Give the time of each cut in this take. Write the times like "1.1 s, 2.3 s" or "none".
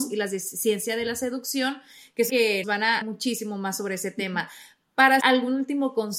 2.3 s, 2.6 s, 3.0 s, 5.2 s